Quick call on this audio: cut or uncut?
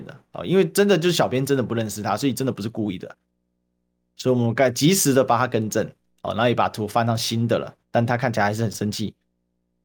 cut